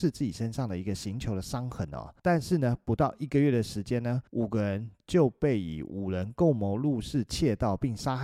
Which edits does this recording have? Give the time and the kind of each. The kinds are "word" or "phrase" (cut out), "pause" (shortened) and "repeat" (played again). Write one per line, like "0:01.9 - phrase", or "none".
0:02.2 - pause
0:04.3 - pause